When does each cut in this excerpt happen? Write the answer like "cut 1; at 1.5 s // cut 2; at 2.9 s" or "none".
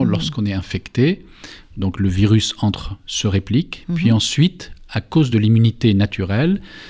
none